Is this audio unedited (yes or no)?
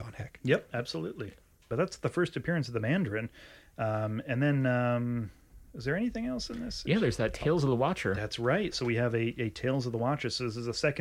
yes